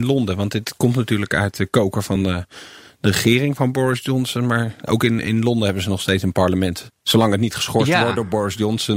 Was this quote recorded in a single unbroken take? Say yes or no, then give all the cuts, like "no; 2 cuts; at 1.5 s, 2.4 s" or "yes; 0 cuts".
yes; 0 cuts